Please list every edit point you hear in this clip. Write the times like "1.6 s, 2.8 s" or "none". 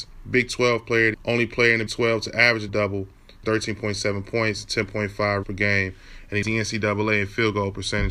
1.1 s, 1.9 s, 2.7 s, 3.4 s, 5.4 s, 6.4 s